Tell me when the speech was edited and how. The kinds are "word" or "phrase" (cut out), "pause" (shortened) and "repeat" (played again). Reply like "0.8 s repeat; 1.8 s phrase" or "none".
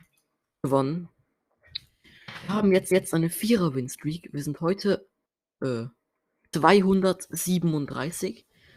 2.9 s repeat; 5.3 s pause; 6.5 s phrase